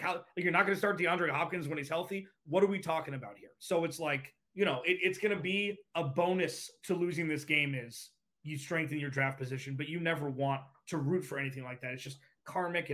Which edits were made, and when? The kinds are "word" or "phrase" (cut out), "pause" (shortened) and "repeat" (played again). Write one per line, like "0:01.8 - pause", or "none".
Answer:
0:04.4 - pause
0:05.9 - pause

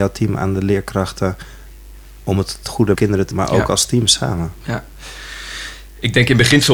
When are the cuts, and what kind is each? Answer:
0:02.9 - phrase
0:03.3 - word

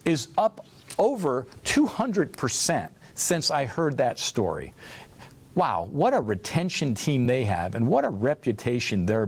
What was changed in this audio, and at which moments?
none

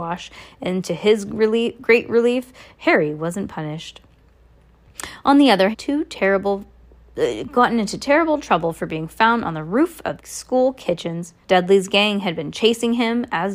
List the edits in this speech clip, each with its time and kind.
0:05.7 - phrase
0:10.2 - word
0:11.4 - pause

